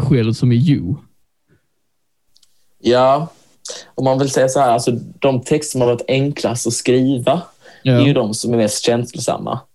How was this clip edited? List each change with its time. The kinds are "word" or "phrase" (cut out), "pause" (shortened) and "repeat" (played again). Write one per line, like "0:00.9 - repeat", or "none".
none